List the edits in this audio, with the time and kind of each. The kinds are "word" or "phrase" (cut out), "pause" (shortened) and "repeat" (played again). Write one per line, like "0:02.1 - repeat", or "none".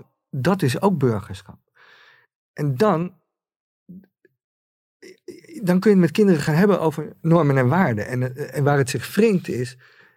none